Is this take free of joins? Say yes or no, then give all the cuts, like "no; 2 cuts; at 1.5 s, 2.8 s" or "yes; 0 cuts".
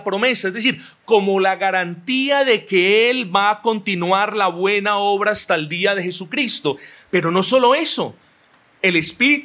yes; 0 cuts